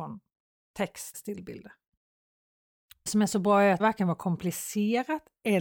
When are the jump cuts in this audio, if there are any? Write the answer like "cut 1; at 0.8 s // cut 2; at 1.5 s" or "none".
cut 1; at 1.1 s // cut 2; at 3.1 s // cut 3; at 3.8 s